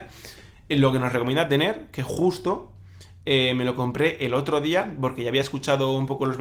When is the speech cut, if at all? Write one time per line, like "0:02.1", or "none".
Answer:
none

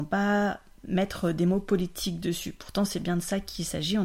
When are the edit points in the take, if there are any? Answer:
none

